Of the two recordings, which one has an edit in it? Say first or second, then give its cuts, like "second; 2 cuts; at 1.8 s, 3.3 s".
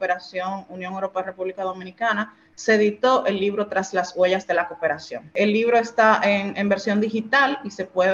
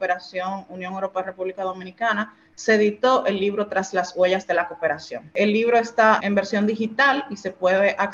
second; 1 cut; at 6.2 s